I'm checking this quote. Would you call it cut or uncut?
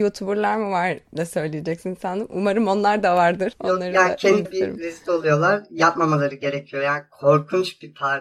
cut